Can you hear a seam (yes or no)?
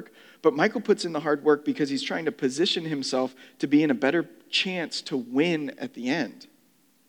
no